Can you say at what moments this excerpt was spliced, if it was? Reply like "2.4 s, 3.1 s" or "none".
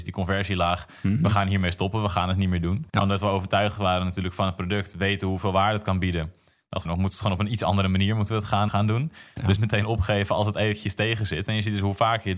2.9 s, 6.8 s, 8.7 s, 9.6 s